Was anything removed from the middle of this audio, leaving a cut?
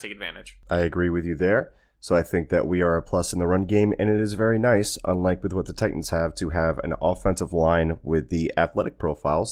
no; 0 cuts

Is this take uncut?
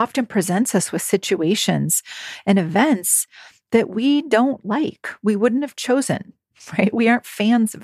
yes; 0 cuts

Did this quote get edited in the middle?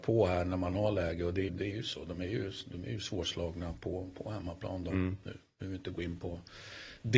yes; 1 cut; at 1.5 s

